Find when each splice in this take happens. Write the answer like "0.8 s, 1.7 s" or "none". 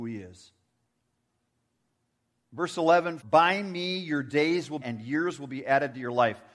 3.2 s, 4.8 s